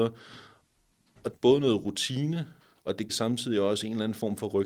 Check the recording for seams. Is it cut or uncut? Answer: cut